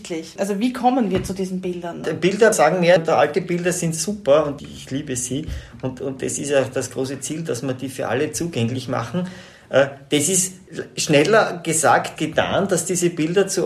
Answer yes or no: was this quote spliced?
yes